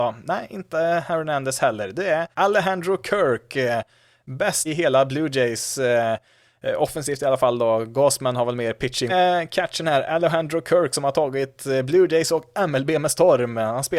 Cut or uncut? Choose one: cut